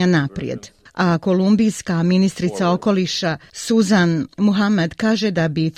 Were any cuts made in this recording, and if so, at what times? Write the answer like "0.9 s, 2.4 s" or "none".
none